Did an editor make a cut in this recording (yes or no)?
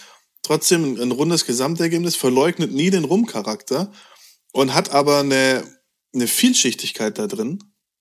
no